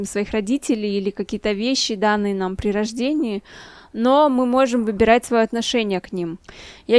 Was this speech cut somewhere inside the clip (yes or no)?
no